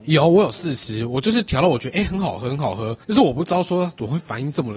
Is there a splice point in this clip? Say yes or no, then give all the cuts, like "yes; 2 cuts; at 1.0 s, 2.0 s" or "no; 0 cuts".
yes; 1 cut; at 3.0 s